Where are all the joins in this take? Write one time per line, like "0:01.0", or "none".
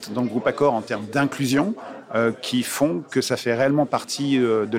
none